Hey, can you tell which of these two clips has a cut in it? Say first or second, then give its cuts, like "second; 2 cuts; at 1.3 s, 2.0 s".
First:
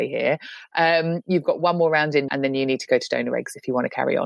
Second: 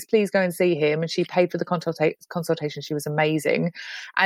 first; 1 cut; at 2.3 s